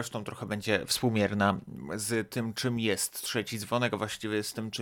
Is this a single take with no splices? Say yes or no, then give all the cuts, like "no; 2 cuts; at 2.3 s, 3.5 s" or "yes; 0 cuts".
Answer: yes; 0 cuts